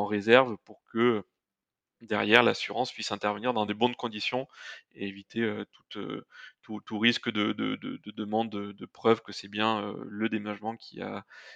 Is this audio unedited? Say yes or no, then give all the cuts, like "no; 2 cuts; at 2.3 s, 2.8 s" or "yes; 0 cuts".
yes; 0 cuts